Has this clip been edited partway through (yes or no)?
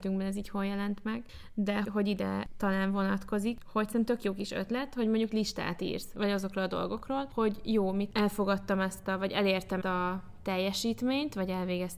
yes